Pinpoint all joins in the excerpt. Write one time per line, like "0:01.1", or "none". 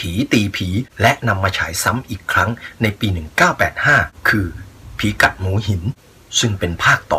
none